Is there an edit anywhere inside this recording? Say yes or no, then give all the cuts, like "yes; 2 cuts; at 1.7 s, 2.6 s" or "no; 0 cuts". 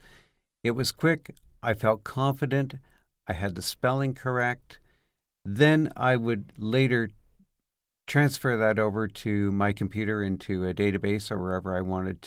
no; 0 cuts